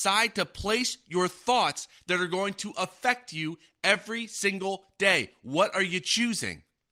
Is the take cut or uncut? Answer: uncut